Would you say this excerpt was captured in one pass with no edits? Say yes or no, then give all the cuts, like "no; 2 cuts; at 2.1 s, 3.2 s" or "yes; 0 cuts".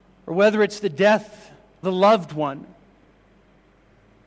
no; 1 cut; at 1.8 s